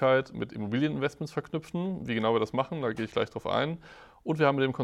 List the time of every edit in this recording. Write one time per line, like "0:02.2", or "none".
none

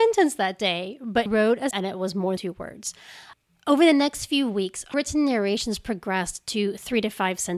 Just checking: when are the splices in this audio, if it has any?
0:01.3
0:01.7
0:02.4
0:04.9

